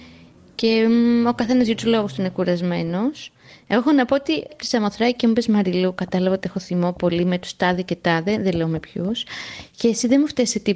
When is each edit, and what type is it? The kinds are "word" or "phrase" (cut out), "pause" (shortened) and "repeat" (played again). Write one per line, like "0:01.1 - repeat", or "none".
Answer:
0:04.5 - word